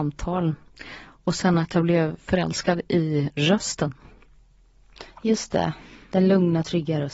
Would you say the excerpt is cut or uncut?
uncut